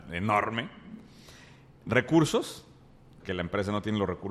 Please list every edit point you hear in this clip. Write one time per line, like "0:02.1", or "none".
0:03.2